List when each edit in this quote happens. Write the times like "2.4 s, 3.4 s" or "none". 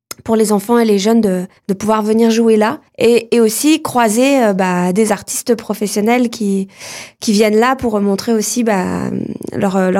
1.6 s, 2.9 s